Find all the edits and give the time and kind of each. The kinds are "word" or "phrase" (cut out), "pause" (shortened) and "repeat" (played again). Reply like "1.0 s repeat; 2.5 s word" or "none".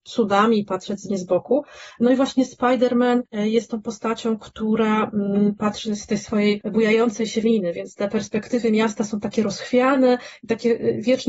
1.1 s word; 7.4 s word